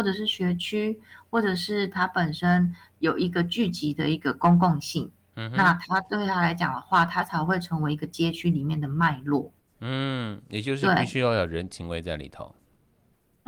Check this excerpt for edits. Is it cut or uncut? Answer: cut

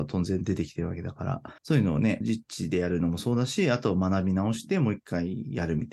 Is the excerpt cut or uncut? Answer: cut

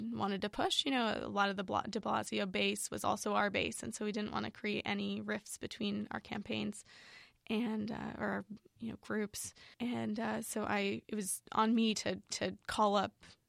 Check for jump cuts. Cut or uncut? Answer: cut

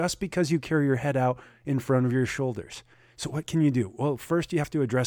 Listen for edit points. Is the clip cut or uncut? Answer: uncut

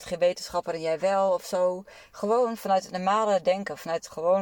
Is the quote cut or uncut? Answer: uncut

